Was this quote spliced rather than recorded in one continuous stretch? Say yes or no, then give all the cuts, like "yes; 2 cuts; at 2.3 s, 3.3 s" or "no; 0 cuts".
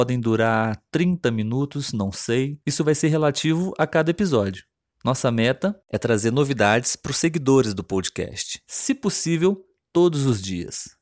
no; 0 cuts